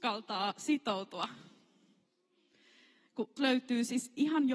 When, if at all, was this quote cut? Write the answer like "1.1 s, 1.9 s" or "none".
3.4 s